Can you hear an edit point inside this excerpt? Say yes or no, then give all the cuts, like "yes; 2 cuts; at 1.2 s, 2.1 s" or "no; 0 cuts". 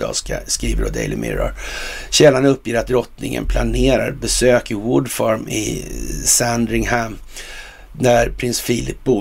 no; 0 cuts